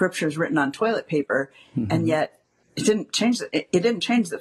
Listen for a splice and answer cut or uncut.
uncut